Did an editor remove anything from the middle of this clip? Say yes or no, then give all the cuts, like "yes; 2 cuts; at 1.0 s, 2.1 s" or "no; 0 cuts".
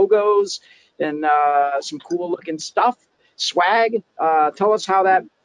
no; 0 cuts